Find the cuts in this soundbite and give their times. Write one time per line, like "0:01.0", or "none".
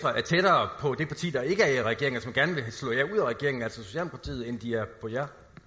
none